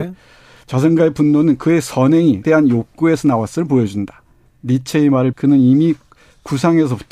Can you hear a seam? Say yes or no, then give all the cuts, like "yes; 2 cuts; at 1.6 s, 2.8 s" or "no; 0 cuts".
yes; 2 cuts; at 2.4 s, 5.3 s